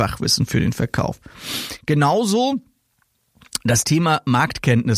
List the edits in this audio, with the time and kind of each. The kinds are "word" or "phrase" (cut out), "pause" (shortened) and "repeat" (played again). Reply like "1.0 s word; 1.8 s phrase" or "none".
none